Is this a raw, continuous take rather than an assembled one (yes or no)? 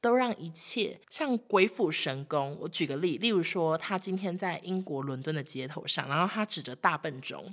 no